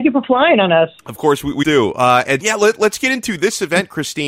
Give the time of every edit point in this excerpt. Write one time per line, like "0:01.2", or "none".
0:01.0
0:01.6
0:02.4